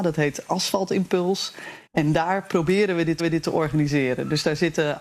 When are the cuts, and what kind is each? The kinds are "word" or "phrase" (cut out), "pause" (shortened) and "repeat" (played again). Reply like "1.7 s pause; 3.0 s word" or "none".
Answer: 1.9 s pause; 3.2 s repeat